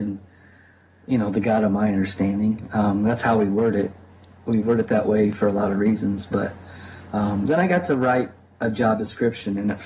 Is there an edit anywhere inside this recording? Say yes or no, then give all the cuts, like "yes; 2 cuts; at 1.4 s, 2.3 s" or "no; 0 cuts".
no; 0 cuts